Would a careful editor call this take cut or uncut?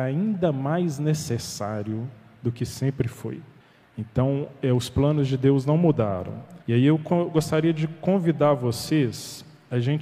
cut